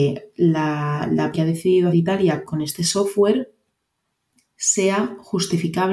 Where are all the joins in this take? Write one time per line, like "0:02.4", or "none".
0:01.3
0:01.9
0:02.4